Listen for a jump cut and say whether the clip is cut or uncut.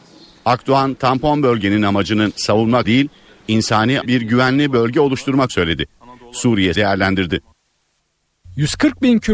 cut